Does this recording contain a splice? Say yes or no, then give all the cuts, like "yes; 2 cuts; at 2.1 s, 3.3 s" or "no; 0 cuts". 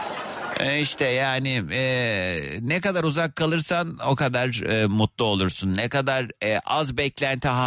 no; 0 cuts